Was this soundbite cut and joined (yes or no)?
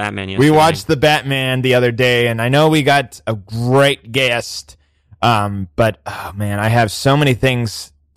no